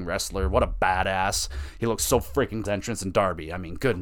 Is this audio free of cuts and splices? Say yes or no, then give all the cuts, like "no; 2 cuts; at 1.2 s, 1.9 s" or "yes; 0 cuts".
no; 1 cut; at 2.7 s